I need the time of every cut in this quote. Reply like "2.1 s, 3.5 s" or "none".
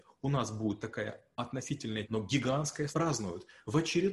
2.0 s, 2.9 s